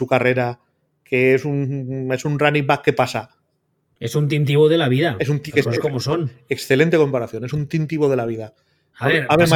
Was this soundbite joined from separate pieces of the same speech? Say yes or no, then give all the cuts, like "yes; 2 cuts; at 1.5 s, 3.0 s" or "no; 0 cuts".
no; 0 cuts